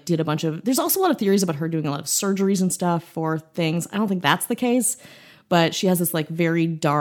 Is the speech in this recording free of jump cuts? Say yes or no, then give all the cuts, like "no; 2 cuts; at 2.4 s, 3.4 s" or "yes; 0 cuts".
yes; 0 cuts